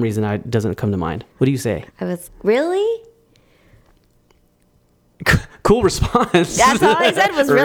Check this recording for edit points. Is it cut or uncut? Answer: cut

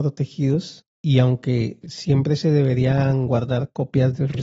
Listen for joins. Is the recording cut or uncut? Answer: uncut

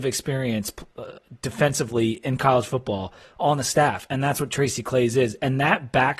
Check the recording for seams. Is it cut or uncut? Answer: uncut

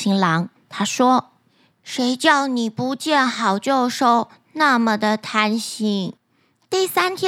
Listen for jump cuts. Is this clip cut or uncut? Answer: cut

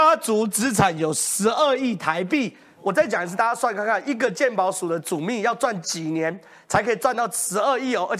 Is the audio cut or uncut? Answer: uncut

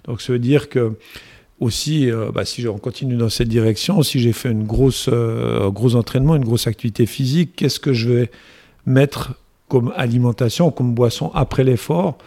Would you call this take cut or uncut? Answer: uncut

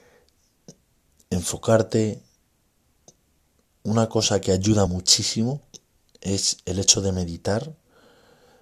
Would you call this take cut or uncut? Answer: cut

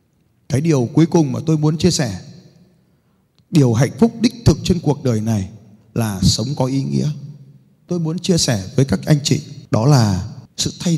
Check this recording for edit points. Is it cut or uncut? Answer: uncut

